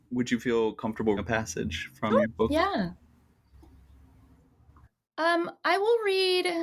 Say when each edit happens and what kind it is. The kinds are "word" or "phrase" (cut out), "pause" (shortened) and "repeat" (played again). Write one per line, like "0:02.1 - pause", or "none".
0:01.2 - word
0:02.2 - word